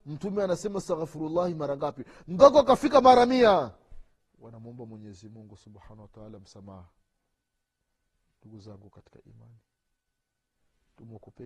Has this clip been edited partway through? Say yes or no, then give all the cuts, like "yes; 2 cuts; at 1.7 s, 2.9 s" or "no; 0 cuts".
no; 0 cuts